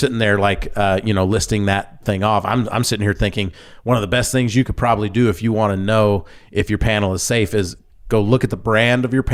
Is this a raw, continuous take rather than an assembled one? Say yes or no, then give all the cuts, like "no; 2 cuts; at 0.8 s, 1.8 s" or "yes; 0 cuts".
yes; 0 cuts